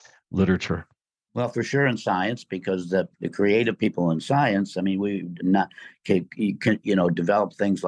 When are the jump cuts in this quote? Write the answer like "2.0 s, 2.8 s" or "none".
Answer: 1.0 s, 3.1 s, 5.4 s